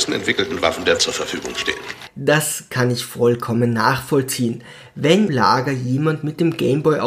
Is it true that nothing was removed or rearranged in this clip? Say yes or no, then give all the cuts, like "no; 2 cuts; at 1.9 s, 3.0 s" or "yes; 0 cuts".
no; 2 cuts; at 1.0 s, 5.3 s